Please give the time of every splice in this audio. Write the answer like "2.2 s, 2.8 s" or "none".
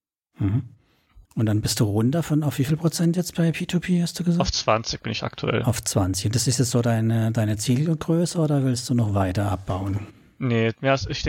1.2 s